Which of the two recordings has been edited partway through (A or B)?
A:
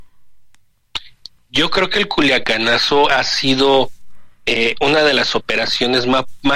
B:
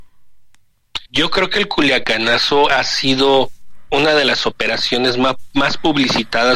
B